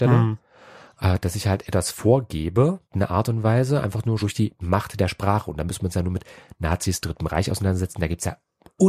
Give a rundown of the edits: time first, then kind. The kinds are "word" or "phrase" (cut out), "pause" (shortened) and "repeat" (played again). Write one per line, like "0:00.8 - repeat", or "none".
0:02.9 - pause
0:04.2 - word